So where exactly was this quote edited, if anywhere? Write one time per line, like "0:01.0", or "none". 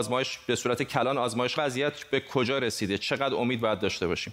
0:01.6